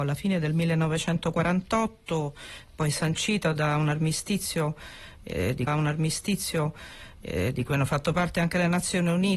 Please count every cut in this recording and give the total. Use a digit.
1